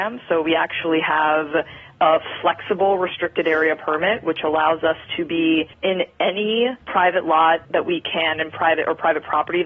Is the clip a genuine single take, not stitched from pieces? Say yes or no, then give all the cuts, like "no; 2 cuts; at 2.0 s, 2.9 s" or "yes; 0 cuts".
no; 3 cuts; at 5.7 s, 6.8 s, 7.6 s